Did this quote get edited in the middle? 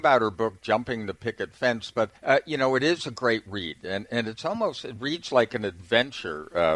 yes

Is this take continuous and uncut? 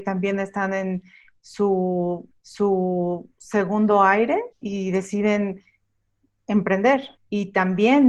no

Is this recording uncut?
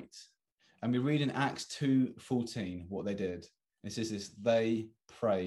yes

